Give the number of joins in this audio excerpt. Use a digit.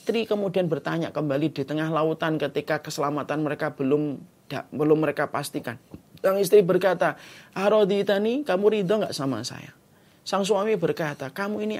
0